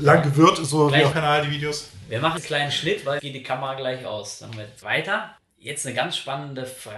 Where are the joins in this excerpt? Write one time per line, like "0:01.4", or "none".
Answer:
0:01.1
0:02.4
0:03.2
0:04.5
0:04.8